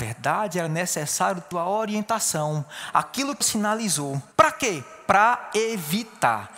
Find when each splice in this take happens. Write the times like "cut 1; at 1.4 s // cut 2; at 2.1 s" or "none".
cut 1; at 1.5 s // cut 2; at 2.9 s // cut 3; at 3.4 s // cut 4; at 4.3 s